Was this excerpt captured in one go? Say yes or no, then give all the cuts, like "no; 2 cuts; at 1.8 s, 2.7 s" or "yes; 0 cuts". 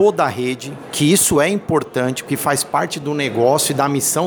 yes; 0 cuts